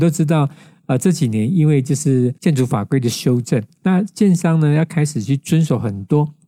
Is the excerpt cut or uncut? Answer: cut